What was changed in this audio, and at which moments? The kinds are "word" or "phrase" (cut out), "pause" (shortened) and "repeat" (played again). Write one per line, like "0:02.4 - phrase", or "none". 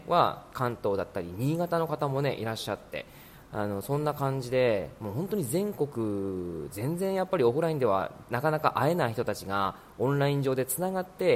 none